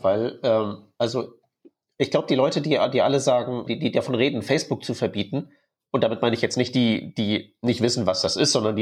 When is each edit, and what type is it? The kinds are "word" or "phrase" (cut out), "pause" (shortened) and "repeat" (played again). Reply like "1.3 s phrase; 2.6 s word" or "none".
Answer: 3.7 s word